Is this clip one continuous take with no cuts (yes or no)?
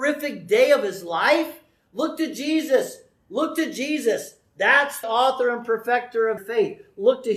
no